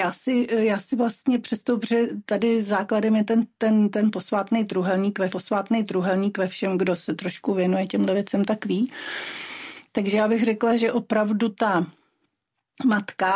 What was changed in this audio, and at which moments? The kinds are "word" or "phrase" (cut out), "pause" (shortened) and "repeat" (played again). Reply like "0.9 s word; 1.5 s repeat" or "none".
5.3 s repeat